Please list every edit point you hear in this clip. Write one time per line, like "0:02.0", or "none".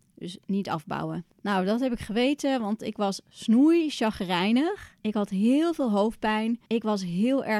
0:01.3
0:05.0
0:06.7